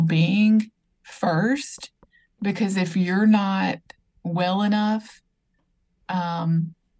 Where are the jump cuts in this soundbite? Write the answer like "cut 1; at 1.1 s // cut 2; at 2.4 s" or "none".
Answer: none